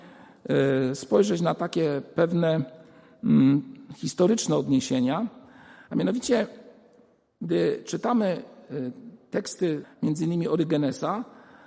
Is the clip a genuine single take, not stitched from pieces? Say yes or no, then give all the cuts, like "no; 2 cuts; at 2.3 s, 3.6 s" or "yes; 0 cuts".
no; 1 cut; at 9.8 s